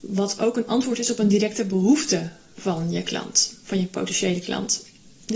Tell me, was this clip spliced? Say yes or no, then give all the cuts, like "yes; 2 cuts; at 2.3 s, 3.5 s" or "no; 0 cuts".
no; 0 cuts